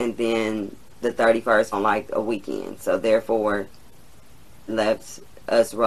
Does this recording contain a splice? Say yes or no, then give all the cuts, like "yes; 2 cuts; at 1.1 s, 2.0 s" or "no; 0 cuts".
yes; 2 cuts; at 1.7 s, 4.7 s